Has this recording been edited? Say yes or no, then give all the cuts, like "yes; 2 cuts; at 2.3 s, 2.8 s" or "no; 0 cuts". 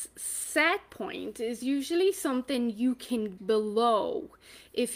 yes; 1 cut; at 3.4 s